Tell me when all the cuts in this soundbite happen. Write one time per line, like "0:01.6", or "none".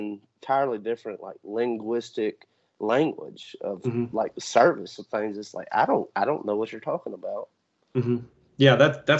none